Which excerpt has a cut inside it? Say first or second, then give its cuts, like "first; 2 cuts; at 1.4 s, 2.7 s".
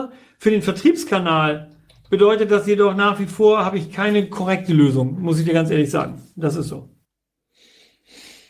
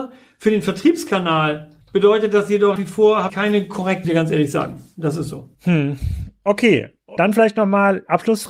second; 6 cuts; at 1.8 s, 2.8 s, 3.3 s, 4.0 s, 5.6 s, 7.2 s